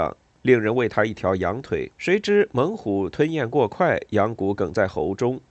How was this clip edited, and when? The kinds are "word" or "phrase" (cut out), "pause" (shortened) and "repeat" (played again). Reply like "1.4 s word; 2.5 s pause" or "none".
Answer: 1.9 s pause